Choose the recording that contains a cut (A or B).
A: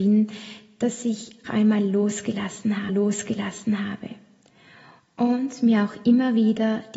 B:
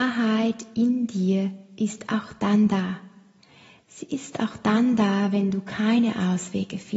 A